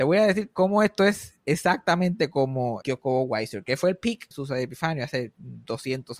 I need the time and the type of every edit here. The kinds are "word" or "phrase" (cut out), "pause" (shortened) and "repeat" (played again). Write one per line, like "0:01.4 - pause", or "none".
0:02.8 - word
0:04.3 - word